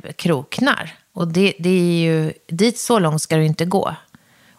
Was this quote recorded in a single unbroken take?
yes; 0 cuts

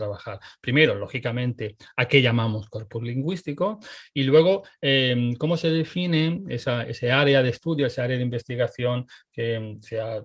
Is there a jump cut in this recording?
no; 0 cuts

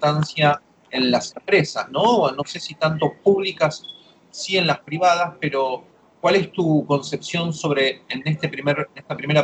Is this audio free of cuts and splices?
yes; 0 cuts

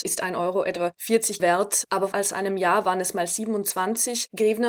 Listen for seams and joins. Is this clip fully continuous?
no; 2 cuts; at 1.4 s, 2.1 s

